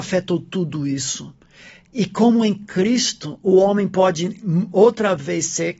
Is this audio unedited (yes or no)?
yes